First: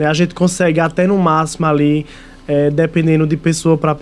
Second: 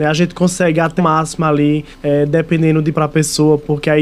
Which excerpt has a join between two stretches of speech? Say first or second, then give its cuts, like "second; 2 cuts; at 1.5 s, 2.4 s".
second; 3 cuts; at 1.0 s, 1.9 s, 2.9 s